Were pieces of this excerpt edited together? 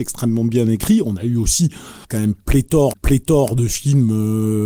yes; 2 cuts; at 2.0 s, 2.9 s

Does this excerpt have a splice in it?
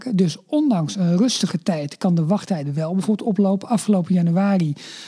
no; 0 cuts

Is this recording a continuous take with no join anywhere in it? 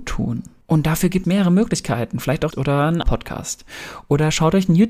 no; 3 cuts; at 1.2 s, 2.5 s, 3.0 s

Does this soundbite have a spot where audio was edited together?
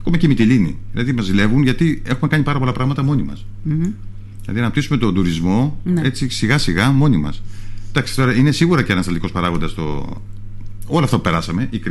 no; 0 cuts

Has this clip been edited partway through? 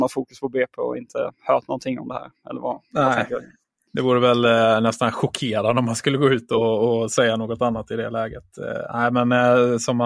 no; 0 cuts

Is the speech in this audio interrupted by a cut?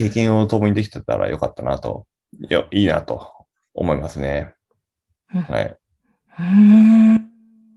no; 0 cuts

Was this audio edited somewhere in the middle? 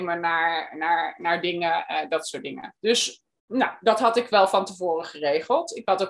yes; 1 cut; at 2.8 s

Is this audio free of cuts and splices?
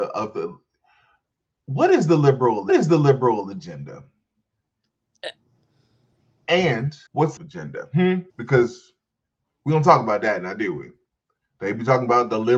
no; 4 cuts; at 2.7 s, 7.1 s, 7.4 s, 8.3 s

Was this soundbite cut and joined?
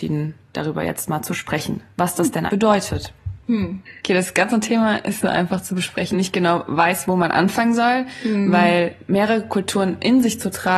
yes; 4 cuts; at 2.5 s, 4.0 s, 5.2 s, 6.1 s

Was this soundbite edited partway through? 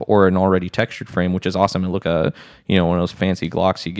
yes; 1 cut; at 2.0 s

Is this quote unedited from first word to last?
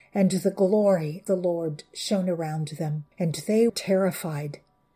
no; 3 cuts; at 1.3 s, 3.1 s, 3.7 s

